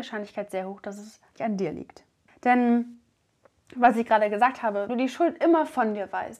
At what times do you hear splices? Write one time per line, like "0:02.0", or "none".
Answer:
0:01.4
0:02.3
0:04.9